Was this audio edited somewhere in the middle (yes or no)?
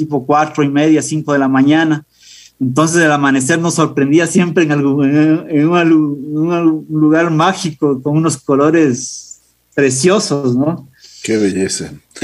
no